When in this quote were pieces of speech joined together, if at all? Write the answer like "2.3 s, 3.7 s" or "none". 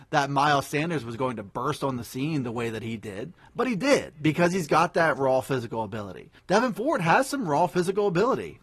6.4 s